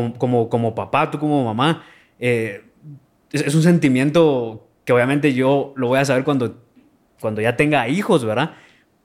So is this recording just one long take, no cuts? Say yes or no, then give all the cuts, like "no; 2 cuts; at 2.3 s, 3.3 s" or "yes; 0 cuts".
yes; 0 cuts